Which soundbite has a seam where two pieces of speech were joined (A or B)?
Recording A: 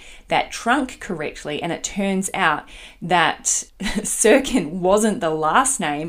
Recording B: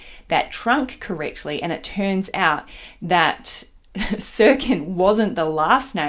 A